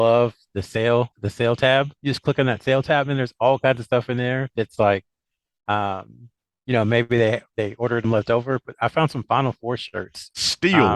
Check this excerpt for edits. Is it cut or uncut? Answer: cut